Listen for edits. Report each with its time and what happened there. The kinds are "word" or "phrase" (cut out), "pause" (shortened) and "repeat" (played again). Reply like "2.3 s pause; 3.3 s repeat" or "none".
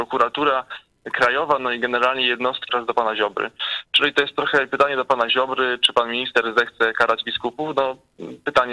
2.7 s phrase